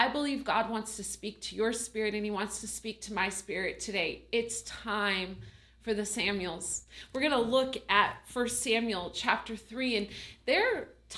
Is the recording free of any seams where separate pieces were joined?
yes; 0 cuts

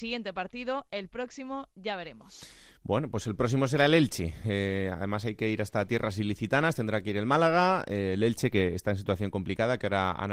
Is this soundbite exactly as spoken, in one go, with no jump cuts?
yes; 0 cuts

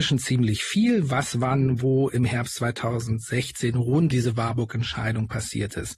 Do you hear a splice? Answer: yes; 1 cut; at 4.1 s

